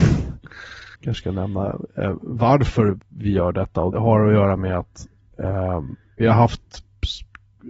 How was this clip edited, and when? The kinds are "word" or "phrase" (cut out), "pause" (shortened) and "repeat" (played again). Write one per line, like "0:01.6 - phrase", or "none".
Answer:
0:00.9 - pause
0:03.9 - word
0:06.2 - word